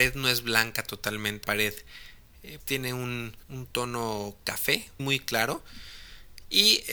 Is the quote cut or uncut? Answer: cut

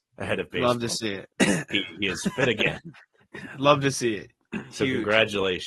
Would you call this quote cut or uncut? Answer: cut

